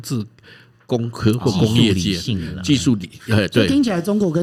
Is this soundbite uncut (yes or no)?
yes